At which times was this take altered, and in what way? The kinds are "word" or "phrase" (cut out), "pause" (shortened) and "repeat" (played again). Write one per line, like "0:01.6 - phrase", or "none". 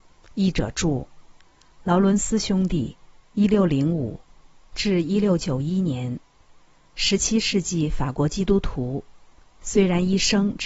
none